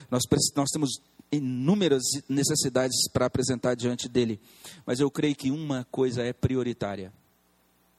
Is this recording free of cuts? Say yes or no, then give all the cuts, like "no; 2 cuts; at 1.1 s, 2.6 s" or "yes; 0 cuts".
yes; 0 cuts